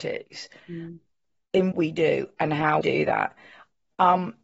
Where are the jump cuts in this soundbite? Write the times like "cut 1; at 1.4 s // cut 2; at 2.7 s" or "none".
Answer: cut 1; at 1.7 s // cut 2; at 2.8 s